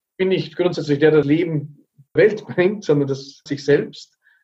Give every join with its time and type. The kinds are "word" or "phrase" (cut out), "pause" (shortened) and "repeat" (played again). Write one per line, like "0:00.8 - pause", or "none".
0:01.2 - word
0:02.2 - word
0:03.5 - word